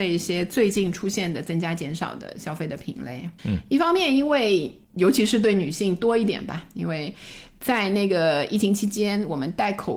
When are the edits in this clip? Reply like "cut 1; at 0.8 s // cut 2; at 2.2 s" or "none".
cut 1; at 3.4 s